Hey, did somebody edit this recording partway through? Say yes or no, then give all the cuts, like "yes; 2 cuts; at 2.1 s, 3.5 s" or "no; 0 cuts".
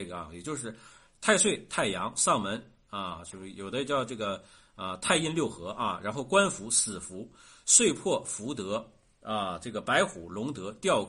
no; 0 cuts